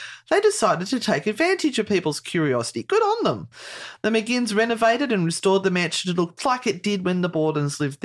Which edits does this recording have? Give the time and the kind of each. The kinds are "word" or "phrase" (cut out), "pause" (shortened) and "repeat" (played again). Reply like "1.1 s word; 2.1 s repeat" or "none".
6.4 s word